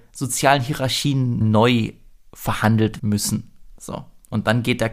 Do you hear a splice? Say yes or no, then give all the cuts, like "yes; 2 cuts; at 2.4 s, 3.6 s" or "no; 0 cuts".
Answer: yes; 2 cuts; at 1.4 s, 3.0 s